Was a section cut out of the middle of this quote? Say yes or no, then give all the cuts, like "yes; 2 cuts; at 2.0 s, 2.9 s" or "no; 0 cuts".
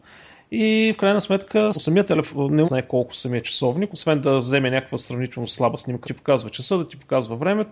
yes; 3 cuts; at 1.7 s, 2.6 s, 6.0 s